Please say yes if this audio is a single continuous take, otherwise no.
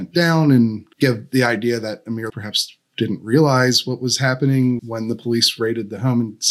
no